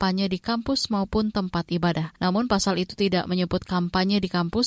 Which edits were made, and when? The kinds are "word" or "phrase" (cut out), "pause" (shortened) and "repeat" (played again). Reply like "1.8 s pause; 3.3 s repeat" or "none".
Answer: 2.2 s pause